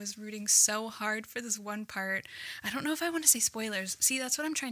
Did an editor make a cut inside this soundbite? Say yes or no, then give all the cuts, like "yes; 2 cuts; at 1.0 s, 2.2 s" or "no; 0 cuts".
no; 0 cuts